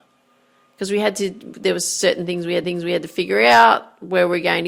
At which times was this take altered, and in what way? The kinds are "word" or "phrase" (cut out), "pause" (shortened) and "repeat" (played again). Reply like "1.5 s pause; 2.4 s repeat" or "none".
2.6 s repeat